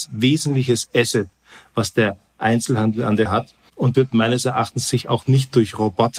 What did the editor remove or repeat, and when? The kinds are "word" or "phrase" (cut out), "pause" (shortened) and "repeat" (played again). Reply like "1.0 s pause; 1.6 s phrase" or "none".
3.3 s word; 3.9 s word